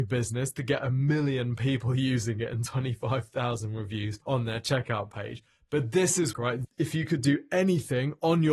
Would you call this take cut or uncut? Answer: cut